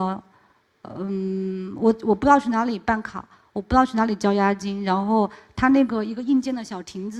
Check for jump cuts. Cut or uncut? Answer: uncut